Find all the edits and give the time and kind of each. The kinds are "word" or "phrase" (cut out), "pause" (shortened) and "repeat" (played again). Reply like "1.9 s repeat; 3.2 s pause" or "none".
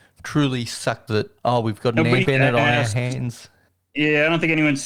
1.1 s word; 1.4 s pause; 2.2 s word; 3.7 s pause